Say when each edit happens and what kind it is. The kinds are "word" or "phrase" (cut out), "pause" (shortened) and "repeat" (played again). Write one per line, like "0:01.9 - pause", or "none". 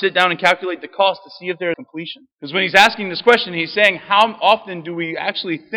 0:01.7 - phrase
0:02.3 - pause